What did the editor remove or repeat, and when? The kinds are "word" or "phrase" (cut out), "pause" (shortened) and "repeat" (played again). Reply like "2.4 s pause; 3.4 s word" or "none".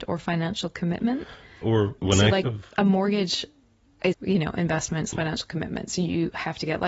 1.6 s word; 2.0 s word; 2.4 s word; 4.1 s word; 5.1 s word